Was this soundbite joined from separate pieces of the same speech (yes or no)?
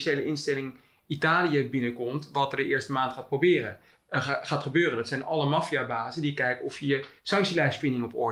yes